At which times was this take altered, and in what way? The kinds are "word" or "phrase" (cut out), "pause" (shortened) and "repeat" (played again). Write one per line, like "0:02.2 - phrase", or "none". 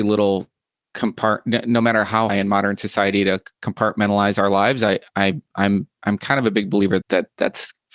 0:02.3 - phrase
0:07.0 - word